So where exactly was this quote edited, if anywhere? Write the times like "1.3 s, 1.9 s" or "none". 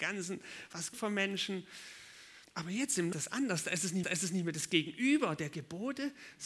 0.9 s, 2.4 s, 3.1 s, 4.0 s

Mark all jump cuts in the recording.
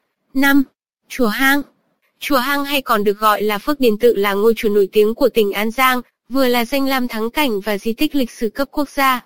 none

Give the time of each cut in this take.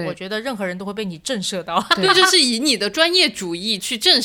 none

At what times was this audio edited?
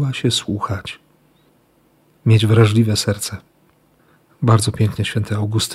none

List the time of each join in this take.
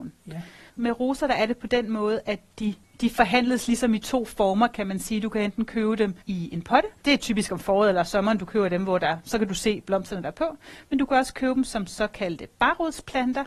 2.8 s, 6.2 s, 7.0 s

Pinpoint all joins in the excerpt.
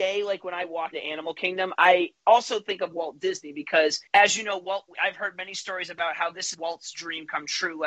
0.9 s, 1.7 s, 4.1 s, 4.9 s, 6.5 s

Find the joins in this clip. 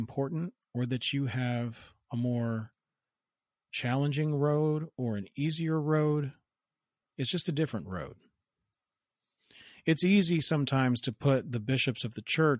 none

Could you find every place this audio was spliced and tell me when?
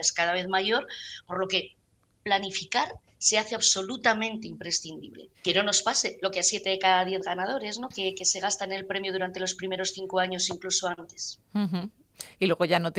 5.3 s

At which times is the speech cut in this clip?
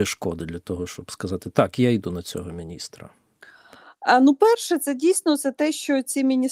none

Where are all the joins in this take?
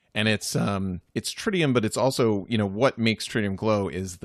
1.1 s

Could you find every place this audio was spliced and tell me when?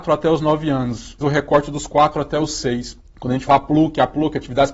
1.2 s, 3.0 s, 3.5 s

